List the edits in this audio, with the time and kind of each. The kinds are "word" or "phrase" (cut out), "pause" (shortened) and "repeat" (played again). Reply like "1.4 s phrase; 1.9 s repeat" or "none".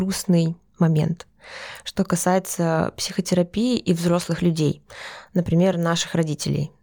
none